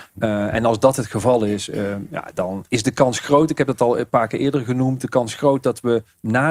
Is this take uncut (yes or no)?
no